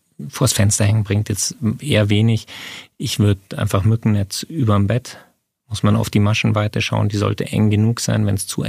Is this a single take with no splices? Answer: yes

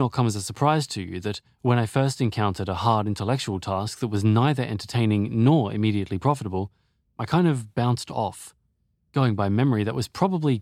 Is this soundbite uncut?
yes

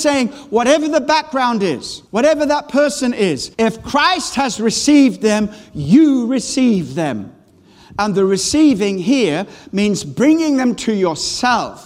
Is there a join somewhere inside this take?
yes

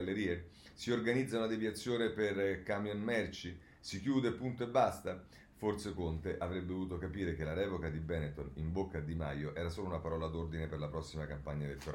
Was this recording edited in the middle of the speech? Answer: no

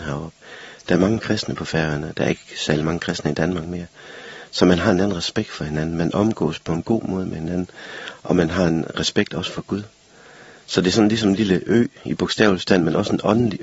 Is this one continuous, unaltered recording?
yes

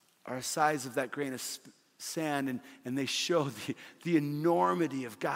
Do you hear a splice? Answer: no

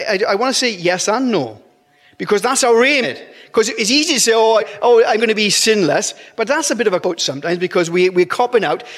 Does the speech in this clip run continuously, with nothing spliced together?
no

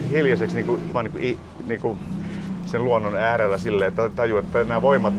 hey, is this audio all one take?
no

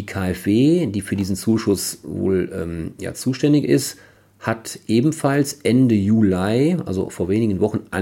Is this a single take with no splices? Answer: yes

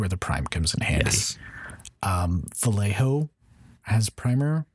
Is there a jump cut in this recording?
no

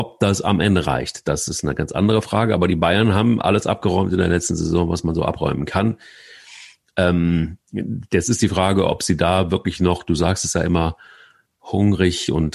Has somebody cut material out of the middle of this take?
no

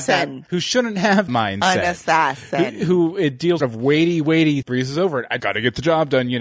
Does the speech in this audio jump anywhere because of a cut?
yes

